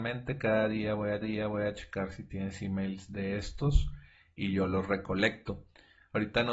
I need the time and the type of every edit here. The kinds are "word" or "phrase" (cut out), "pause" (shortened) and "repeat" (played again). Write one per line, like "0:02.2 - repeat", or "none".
0:01.2 - repeat